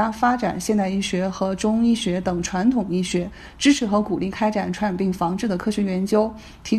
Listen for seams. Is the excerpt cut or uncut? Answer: uncut